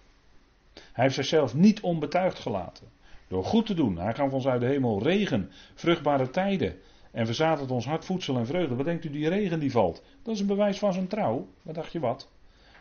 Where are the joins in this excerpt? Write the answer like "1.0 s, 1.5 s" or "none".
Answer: 8.0 s